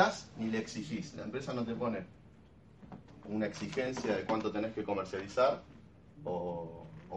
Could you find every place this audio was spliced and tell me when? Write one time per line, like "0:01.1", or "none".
none